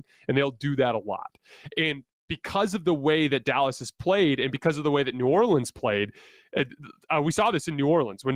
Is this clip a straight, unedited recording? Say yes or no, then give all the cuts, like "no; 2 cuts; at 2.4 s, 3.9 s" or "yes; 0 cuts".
yes; 0 cuts